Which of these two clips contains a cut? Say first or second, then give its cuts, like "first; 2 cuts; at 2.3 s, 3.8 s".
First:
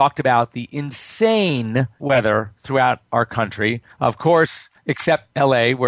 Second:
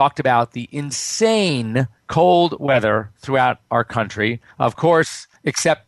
first; 1 cut; at 2.0 s